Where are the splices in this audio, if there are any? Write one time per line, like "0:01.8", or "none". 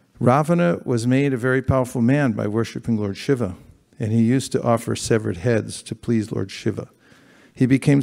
none